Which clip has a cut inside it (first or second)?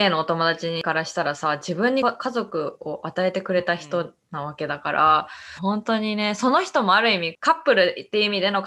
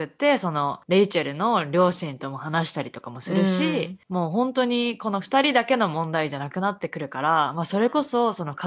first